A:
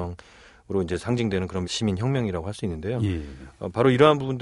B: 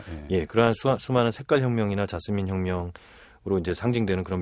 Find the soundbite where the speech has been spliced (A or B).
A